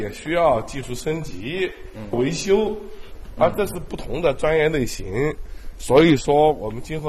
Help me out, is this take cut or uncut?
uncut